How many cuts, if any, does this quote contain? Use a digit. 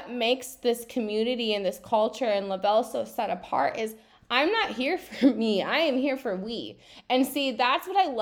0